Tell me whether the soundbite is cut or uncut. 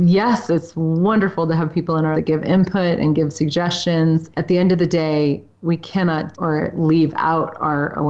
cut